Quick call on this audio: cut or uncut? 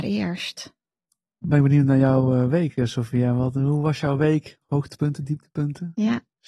uncut